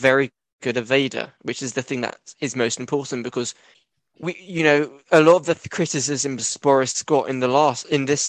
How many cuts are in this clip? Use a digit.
2